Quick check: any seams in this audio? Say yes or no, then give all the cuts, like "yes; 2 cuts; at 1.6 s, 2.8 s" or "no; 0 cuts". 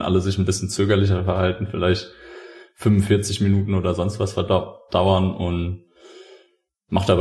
no; 0 cuts